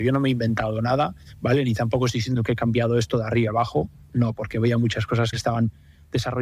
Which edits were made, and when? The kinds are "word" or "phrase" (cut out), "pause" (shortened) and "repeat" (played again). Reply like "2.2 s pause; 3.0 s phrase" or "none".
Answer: 5.3 s phrase